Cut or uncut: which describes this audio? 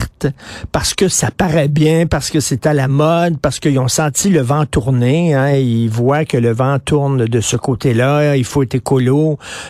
uncut